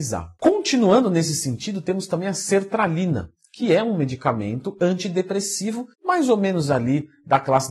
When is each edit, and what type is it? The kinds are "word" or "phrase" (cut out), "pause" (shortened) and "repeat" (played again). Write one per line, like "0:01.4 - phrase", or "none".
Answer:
0:05.9 - pause